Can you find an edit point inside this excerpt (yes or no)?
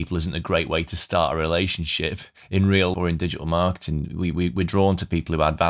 yes